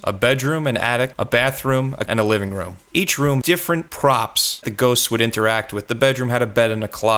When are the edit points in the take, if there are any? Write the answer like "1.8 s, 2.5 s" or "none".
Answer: 2.1 s, 3.4 s, 4.6 s